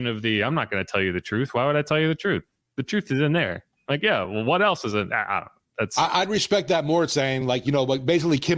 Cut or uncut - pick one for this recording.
uncut